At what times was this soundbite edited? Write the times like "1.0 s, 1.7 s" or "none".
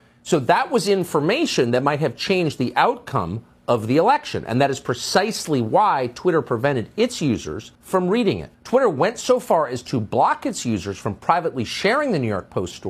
7.8 s, 8.5 s